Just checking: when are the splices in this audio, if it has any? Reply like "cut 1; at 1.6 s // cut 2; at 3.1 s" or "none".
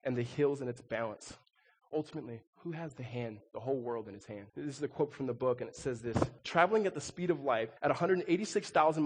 cut 1; at 2.5 s // cut 2; at 4.5 s // cut 3; at 6.4 s // cut 4; at 7.8 s